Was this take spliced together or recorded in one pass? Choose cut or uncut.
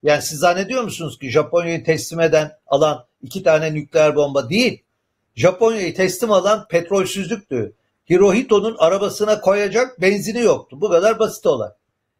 uncut